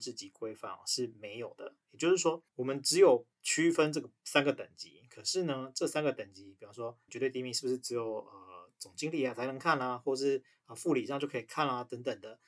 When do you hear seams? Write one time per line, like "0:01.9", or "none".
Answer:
0:02.5
0:03.3
0:07.1